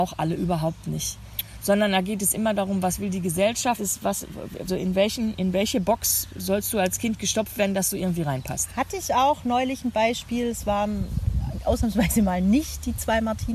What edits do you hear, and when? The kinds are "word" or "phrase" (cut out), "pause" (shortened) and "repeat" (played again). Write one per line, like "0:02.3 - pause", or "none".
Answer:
0:03.8 - word
0:04.7 - word

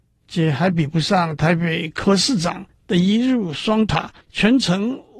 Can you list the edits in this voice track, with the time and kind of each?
0:04.2 - pause

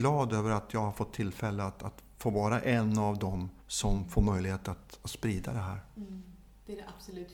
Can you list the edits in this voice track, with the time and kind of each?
0:03.6 - pause

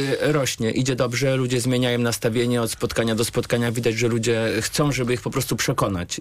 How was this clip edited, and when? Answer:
none

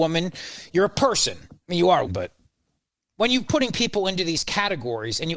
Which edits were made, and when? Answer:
0:01.6 - pause
0:02.1 - word
0:02.7 - pause
0:03.5 - word

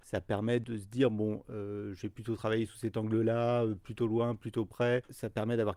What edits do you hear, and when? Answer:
none

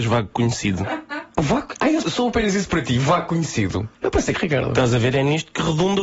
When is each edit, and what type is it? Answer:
0:02.0 - word
0:03.9 - pause
0:04.3 - phrase

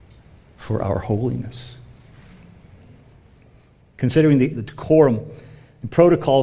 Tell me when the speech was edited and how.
0:04.5 - word

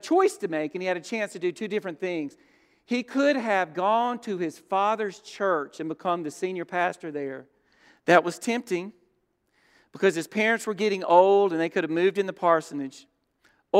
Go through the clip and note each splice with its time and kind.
none

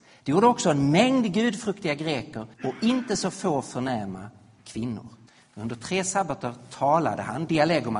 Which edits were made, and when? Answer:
0:02.5 - pause
0:05.3 - pause

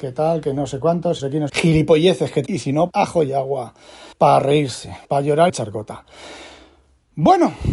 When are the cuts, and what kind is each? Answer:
0:01.2 - word
0:01.5 - phrase
0:02.5 - word
0:02.9 - word
0:04.1 - pause
0:05.0 - pause
0:05.5 - phrase

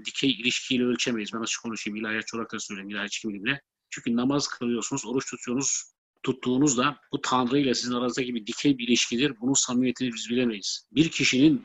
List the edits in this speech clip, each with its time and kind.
none

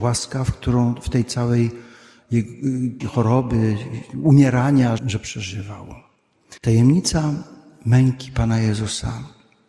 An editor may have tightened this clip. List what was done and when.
0:03.0 - word
0:05.0 - word
0:06.6 - pause

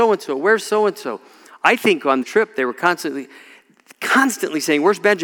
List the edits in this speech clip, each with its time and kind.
0:02.2 - word

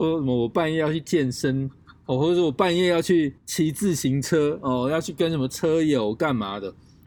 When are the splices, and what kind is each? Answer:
0:03.4 - pause

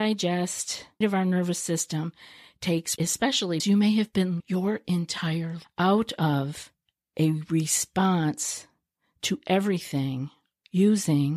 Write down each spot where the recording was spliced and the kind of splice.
0:01.0 - word
0:03.0 - word
0:03.6 - word
0:04.4 - word
0:05.6 - word

